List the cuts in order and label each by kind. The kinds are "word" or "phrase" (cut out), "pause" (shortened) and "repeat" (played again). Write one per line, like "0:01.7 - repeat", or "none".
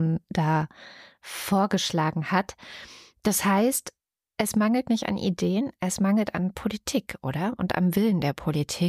none